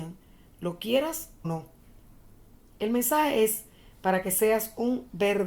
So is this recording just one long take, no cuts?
no; 1 cut; at 1.4 s

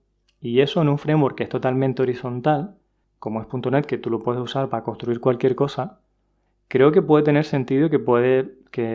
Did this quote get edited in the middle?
no; 0 cuts

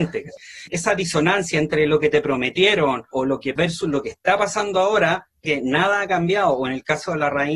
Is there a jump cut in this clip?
yes; 3 cuts; at 3.1 s, 3.6 s, 5.4 s

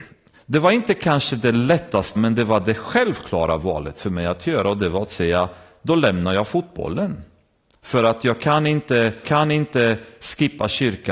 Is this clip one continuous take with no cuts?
no; 2 cuts; at 2.2 s, 9.2 s

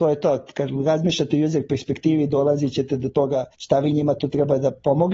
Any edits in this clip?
yes; 1 cut; at 3.5 s

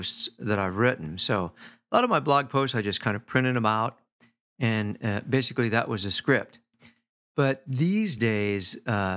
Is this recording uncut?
yes; 0 cuts

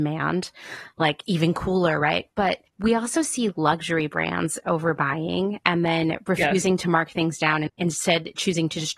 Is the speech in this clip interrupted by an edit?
yes; 2 cuts; at 1.2 s, 2.7 s

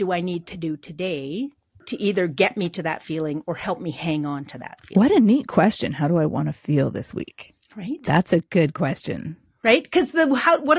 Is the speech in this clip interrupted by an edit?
no; 0 cuts

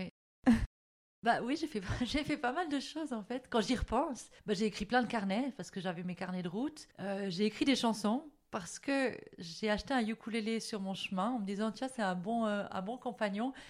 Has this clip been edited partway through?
yes; 2 cuts; at 4.4 s, 6.9 s

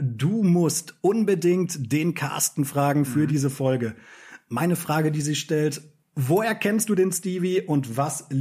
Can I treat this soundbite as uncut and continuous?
yes; 0 cuts

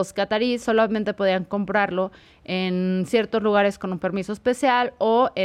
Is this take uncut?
yes; 0 cuts

